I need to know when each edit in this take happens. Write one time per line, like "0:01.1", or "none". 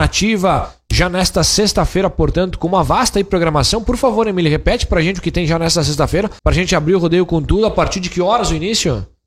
0:06.4